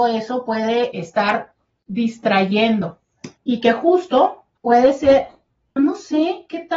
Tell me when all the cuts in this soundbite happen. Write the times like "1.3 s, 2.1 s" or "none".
0.9 s, 3.4 s, 4.6 s, 5.8 s